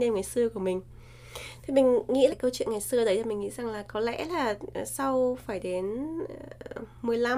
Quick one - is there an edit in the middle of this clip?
yes; 1 cut; at 2.3 s

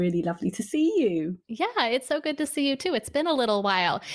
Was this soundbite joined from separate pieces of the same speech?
no; 0 cuts

